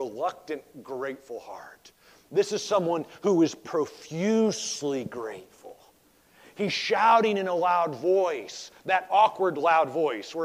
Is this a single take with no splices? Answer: yes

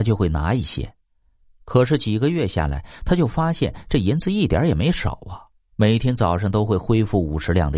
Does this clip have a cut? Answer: no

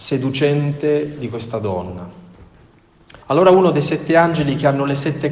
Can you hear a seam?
yes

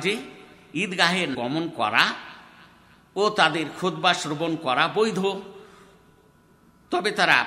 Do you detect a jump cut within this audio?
yes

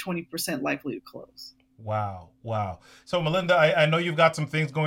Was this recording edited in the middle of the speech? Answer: no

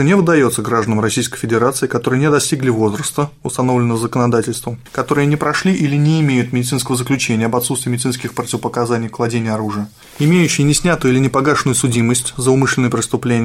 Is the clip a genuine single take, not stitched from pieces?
yes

